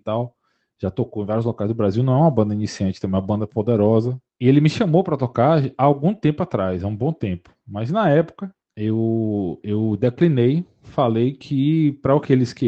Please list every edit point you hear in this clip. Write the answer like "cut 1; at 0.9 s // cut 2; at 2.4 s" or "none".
cut 1; at 4.3 s // cut 2; at 8.6 s